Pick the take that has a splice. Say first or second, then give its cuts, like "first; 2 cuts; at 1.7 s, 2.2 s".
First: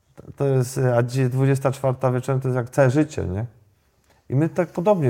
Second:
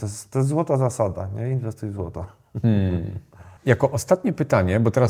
second; 1 cut; at 3.6 s